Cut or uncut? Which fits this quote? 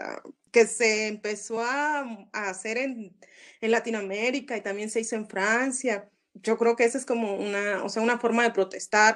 uncut